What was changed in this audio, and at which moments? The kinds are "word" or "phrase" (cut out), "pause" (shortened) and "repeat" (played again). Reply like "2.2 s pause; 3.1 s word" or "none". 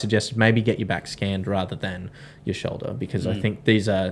none